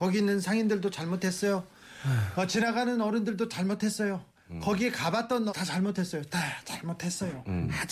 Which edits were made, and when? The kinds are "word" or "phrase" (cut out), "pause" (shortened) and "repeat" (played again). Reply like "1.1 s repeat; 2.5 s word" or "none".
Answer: 5.5 s word